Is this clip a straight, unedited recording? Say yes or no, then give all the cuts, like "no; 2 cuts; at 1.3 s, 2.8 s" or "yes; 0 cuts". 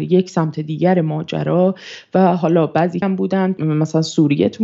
no; 2 cuts; at 3.0 s, 3.6 s